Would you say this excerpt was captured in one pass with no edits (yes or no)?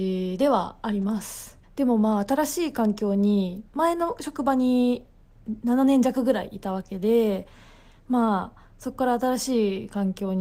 no